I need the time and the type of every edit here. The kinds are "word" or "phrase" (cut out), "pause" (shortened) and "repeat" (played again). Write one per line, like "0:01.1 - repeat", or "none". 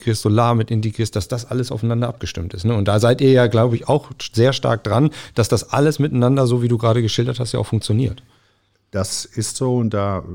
none